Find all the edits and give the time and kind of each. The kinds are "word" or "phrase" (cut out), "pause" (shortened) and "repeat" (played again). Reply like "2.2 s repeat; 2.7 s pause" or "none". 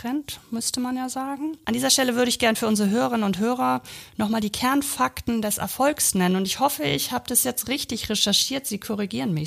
none